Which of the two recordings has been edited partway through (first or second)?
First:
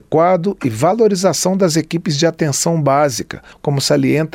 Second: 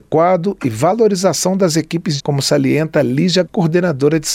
second